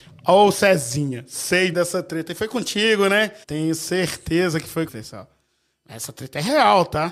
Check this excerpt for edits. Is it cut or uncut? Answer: cut